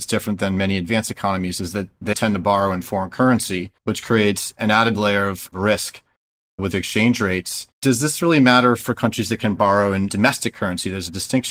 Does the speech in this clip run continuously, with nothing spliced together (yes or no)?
no